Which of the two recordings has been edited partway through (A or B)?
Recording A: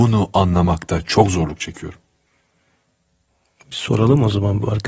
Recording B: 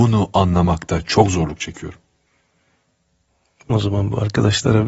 B